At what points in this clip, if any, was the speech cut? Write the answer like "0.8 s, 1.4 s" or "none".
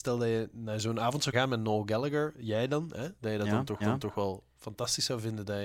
1.3 s, 3.2 s, 3.8 s